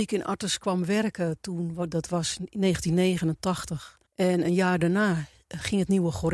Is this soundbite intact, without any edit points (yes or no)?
no